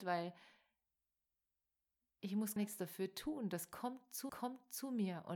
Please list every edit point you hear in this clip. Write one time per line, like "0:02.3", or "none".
0:02.6
0:04.3